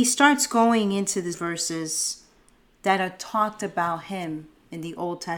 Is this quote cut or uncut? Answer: cut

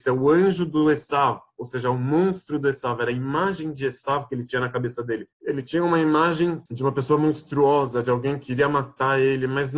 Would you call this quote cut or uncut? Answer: cut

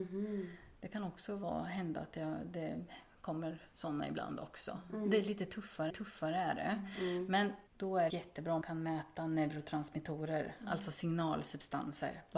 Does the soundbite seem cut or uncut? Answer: cut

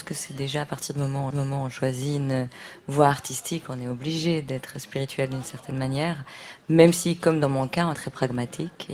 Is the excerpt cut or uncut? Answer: cut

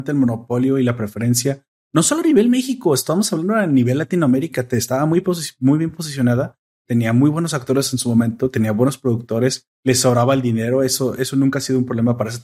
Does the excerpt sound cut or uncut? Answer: cut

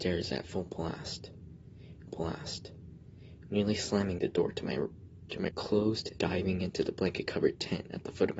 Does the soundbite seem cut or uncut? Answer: cut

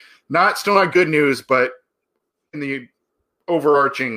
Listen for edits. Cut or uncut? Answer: uncut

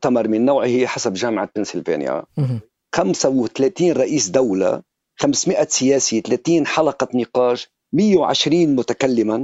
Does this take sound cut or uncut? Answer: uncut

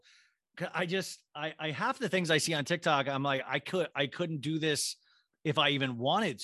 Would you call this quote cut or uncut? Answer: uncut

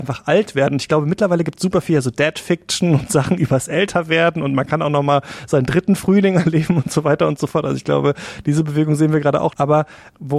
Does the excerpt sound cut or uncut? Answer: uncut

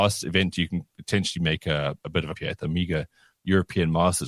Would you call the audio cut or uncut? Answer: cut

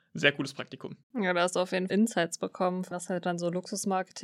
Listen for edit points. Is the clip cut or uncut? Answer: cut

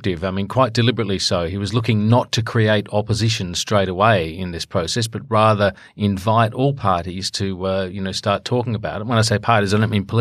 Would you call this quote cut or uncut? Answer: uncut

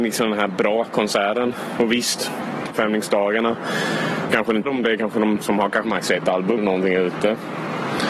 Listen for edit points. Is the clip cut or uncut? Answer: cut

